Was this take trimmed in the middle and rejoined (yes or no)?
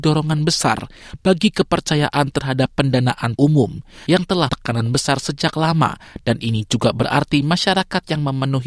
yes